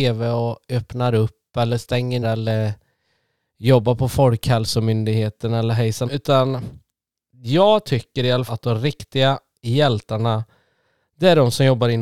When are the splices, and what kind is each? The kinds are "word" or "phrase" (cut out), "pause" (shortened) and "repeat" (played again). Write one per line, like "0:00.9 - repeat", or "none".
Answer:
0:02.2 - word
0:06.1 - word
0:08.5 - word